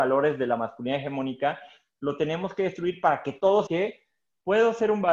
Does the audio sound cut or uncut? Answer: cut